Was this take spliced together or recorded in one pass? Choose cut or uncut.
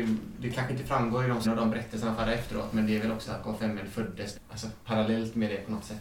cut